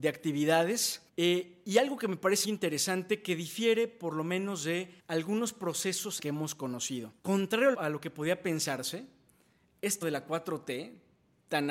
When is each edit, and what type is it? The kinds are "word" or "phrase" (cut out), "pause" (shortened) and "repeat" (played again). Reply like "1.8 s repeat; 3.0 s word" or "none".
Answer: 1.1 s pause; 2.4 s word; 5.0 s pause; 6.2 s word; 7.2 s pause; 7.7 s phrase; 10.0 s word